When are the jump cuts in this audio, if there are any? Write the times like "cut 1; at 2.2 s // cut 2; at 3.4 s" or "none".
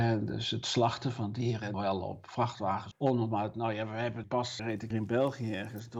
cut 1; at 1.7 s // cut 2; at 2.9 s // cut 3; at 4.2 s // cut 4; at 4.6 s // cut 5; at 4.9 s